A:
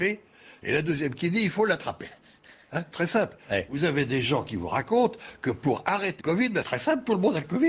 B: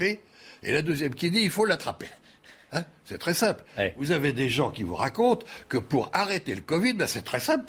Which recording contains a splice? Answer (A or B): A